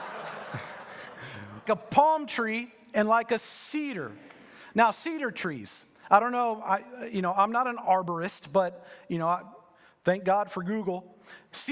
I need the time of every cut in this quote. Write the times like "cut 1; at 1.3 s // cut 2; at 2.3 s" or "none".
cut 1; at 1.6 s